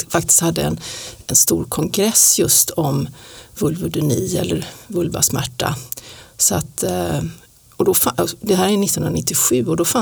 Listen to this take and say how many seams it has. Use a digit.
0